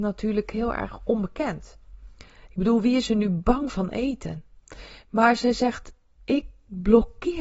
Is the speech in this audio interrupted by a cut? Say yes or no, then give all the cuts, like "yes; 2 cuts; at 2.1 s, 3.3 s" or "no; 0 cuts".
no; 0 cuts